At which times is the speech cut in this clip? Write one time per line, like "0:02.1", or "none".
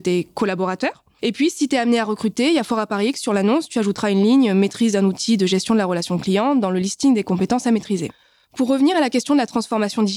none